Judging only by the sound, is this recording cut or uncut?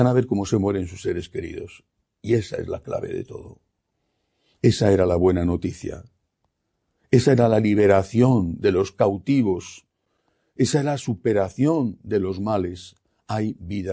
uncut